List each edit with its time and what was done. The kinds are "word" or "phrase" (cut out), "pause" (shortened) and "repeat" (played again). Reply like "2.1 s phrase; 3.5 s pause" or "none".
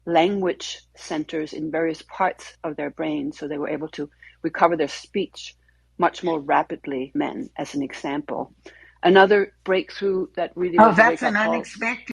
7.2 s word